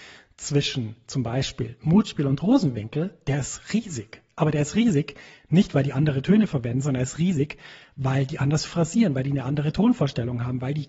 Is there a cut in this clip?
no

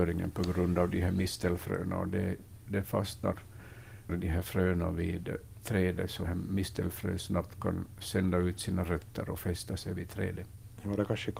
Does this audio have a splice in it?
yes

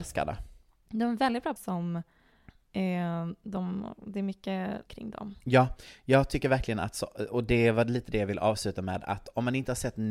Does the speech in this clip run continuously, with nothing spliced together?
no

